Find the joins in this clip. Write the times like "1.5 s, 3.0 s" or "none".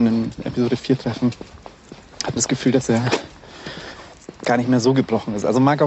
2.4 s, 4.4 s